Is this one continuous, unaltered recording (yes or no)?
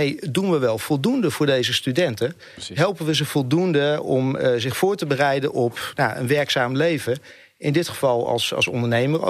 yes